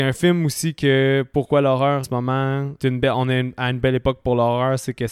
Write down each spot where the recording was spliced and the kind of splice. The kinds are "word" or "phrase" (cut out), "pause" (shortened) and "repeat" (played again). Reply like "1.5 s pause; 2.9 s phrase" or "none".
2.0 s word; 2.8 s word